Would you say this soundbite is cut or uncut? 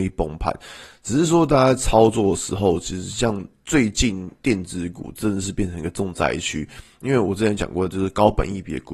uncut